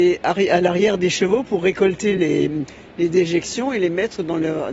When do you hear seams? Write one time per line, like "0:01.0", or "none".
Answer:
none